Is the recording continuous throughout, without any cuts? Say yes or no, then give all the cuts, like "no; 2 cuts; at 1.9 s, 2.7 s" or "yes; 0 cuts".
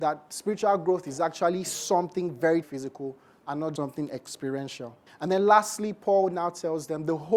no; 3 cuts; at 2.6 s, 3.8 s, 5.1 s